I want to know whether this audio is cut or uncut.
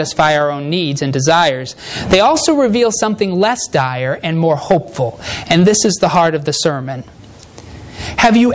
uncut